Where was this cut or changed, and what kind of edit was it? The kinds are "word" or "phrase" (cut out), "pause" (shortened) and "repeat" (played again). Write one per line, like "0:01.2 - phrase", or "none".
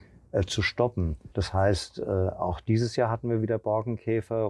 0:01.3 - pause